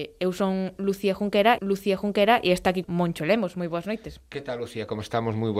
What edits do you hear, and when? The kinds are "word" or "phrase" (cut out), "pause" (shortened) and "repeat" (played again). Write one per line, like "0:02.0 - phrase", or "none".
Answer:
0:01.6 - repeat
0:02.8 - phrase